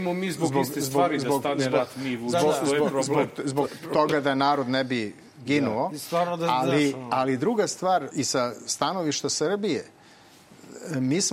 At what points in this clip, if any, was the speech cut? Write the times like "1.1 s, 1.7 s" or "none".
8.1 s

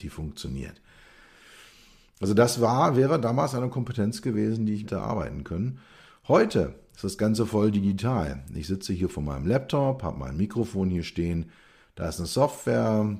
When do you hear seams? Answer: 4.8 s

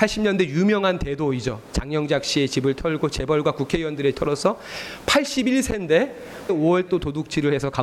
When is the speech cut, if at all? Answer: 4.1 s, 6.5 s, 6.9 s

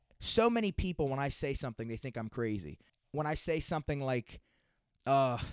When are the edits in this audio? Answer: 2.9 s

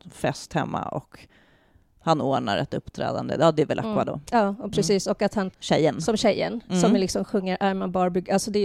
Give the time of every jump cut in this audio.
5.5 s

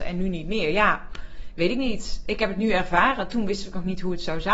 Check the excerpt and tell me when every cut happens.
none

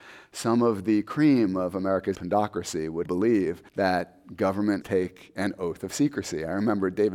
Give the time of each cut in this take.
2.1 s, 3.0 s, 3.7 s, 4.8 s

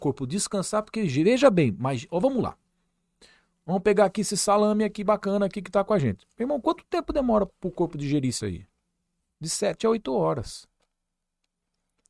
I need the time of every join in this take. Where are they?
7.5 s, 8.4 s

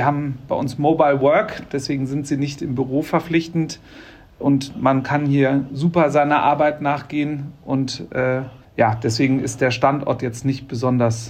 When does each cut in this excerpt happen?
8.6 s

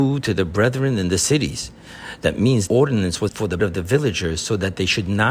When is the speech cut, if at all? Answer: 2.7 s, 3.3 s, 3.6 s

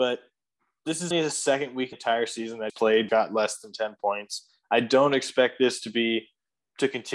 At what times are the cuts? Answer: 1.1 s, 1.9 s, 2.7 s, 3.1 s

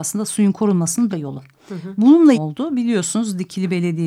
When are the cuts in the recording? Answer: 1.1 s, 2.3 s

